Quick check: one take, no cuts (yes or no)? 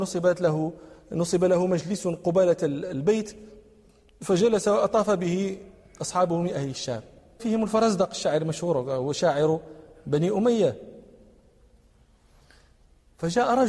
no